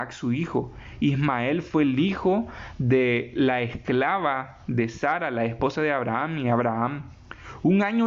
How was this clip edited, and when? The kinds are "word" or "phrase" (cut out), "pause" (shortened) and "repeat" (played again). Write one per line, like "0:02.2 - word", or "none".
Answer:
none